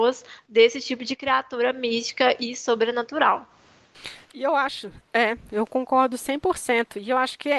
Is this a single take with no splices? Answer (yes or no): no